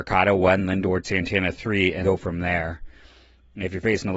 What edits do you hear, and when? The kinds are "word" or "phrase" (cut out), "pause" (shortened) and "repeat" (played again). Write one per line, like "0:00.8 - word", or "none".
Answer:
0:01.0 - word
0:02.0 - word